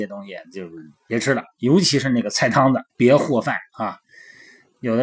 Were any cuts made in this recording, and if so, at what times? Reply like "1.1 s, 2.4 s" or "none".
2.9 s